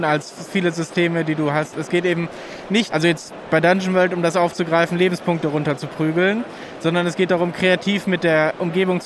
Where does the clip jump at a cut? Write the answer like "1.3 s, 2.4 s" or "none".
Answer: 2.9 s